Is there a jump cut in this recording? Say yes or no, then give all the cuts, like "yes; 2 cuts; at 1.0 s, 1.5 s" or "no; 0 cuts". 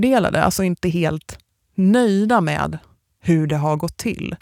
no; 0 cuts